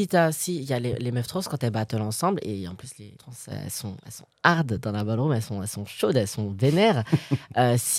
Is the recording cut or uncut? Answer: cut